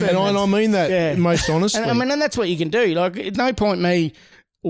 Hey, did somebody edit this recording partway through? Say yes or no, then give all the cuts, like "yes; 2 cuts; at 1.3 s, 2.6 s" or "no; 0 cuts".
yes; 1 cut; at 3.3 s